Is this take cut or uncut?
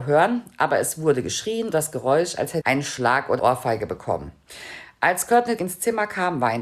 cut